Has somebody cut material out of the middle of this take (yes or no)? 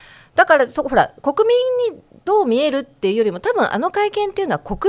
no